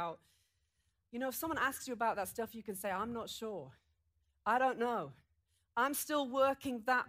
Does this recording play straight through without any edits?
yes; 0 cuts

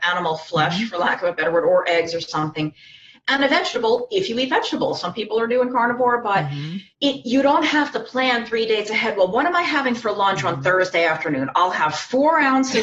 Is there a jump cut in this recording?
yes; 1 cut; at 6.9 s

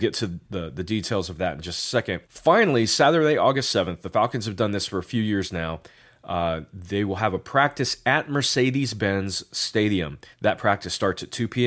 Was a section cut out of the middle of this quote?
yes; 2 cuts; at 2.3 s, 10.3 s

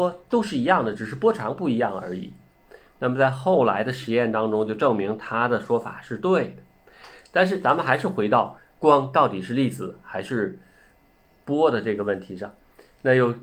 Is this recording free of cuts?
yes; 0 cuts

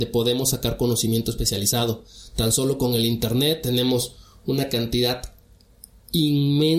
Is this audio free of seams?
yes; 0 cuts

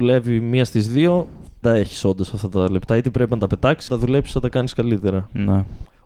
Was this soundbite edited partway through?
yes; 2 cuts; at 1.6 s, 3.9 s

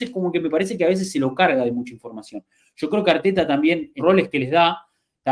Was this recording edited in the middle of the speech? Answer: yes; 1 cut; at 4.0 s

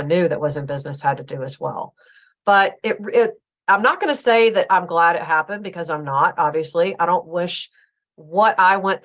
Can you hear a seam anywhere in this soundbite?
no; 0 cuts

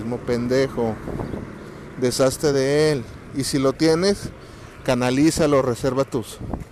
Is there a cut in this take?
no; 0 cuts

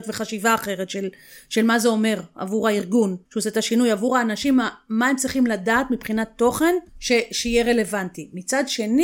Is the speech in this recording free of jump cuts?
no; 2 cuts; at 3.3 s, 6.9 s

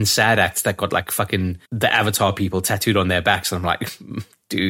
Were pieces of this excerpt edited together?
yes; 1 cut; at 1.7 s

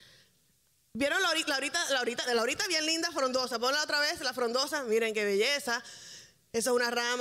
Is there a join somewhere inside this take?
yes; 1 cut; at 2.3 s

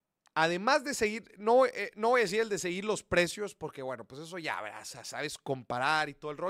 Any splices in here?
no; 0 cuts

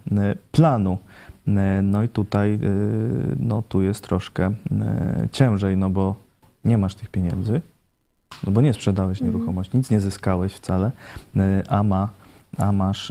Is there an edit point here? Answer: no; 0 cuts

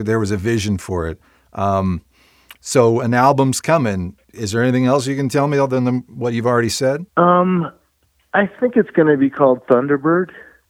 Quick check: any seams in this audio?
yes; 1 cut; at 7.1 s

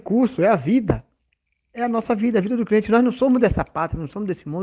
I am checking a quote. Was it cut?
no; 0 cuts

